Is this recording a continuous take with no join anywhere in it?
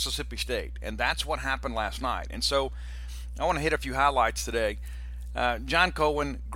yes; 0 cuts

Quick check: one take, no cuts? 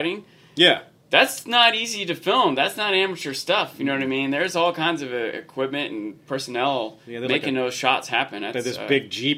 yes; 0 cuts

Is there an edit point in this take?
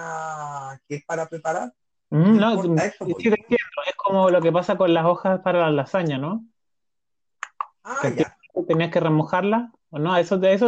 yes; 1 cut; at 7.7 s

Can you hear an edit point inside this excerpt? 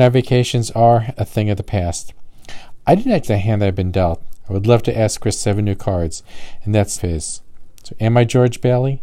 yes; 2 cuts; at 3.2 s, 7.0 s

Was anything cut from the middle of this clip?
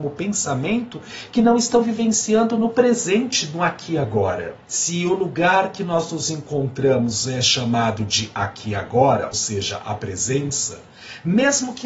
yes; 2 cuts; at 4.6 s, 9.3 s

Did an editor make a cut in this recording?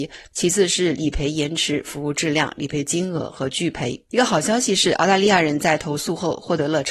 yes; 1 cut; at 4.1 s

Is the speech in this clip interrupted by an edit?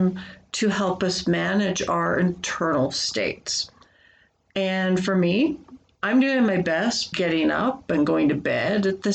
yes; 1 cut; at 7.1 s

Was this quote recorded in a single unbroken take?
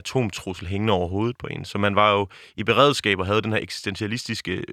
yes; 0 cuts

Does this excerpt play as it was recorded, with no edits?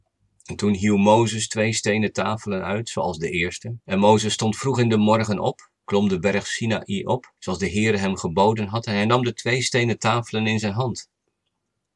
no; 3 cuts; at 3.8 s, 5.8 s, 7.4 s

